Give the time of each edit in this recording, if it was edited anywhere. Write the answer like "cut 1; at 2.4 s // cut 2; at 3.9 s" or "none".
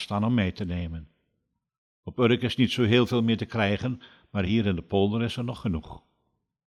none